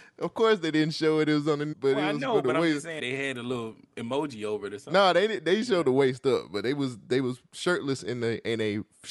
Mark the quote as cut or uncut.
cut